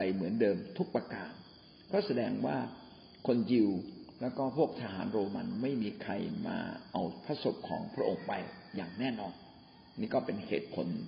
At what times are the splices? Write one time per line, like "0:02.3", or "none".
none